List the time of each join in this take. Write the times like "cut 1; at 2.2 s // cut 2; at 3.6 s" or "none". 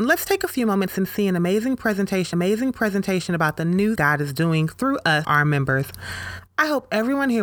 cut 1; at 2.3 s // cut 2; at 4.0 s // cut 3; at 5.2 s